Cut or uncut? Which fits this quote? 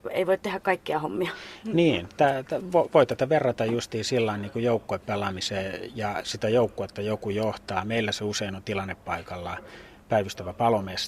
uncut